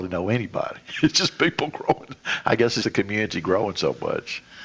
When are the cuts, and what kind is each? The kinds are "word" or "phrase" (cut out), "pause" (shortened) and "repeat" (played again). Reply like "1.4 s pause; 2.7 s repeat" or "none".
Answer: 2.8 s word